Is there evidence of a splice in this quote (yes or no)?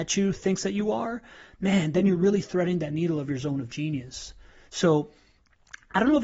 no